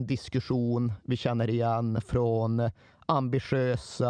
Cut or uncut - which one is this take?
uncut